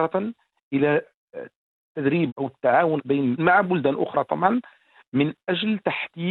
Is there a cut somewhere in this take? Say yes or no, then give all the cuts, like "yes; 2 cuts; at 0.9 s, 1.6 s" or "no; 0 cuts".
yes; 3 cuts; at 2.3 s, 3.0 s, 3.4 s